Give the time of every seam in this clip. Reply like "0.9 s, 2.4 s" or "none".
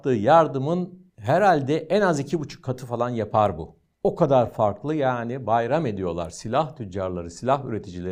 1.1 s, 3.9 s